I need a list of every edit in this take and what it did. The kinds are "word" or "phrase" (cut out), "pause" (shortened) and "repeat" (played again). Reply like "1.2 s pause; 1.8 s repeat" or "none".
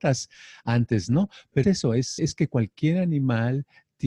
1.6 s word; 2.2 s word